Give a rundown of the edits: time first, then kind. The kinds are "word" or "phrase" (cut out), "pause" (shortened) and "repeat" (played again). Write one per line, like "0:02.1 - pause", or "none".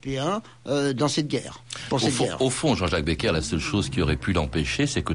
none